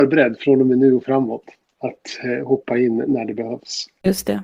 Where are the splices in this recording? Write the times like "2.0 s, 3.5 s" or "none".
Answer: none